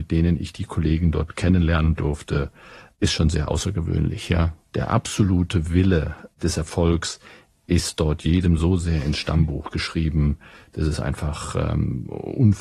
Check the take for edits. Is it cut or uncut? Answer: uncut